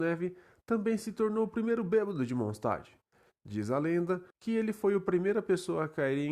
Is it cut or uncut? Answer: cut